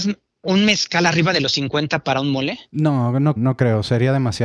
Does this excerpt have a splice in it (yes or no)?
yes